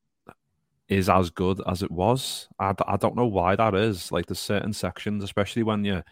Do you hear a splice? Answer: no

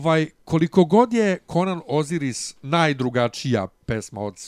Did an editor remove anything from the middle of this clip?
no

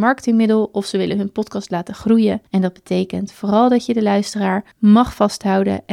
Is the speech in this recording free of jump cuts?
no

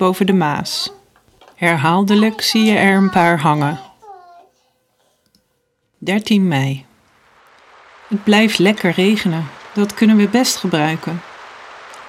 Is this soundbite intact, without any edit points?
yes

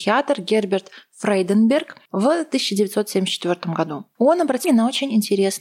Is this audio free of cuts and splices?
no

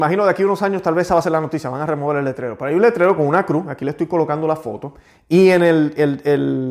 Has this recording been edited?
no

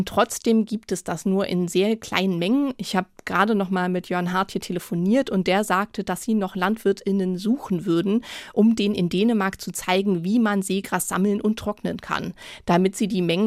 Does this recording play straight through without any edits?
yes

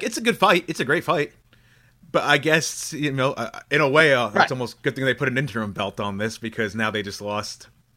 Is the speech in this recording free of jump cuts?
yes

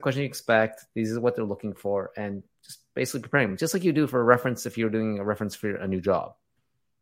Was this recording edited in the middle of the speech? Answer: no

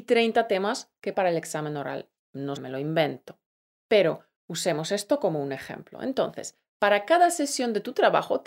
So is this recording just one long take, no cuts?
no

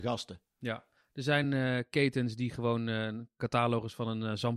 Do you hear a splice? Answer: no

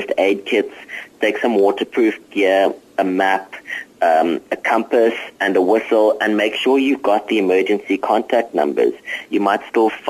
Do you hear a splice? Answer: no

